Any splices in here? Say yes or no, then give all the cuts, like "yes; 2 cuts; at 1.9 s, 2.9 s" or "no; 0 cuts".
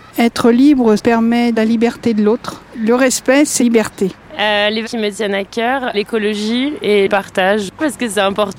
yes; 6 cuts; at 1.0 s, 1.5 s, 3.6 s, 4.8 s, 5.9 s, 7.1 s